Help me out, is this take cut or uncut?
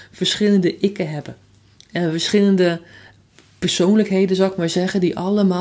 uncut